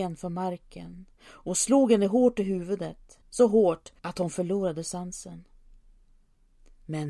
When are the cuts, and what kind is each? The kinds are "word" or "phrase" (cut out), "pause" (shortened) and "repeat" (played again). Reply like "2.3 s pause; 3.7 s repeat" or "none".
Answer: 1.1 s pause; 3.2 s pause; 4.0 s pause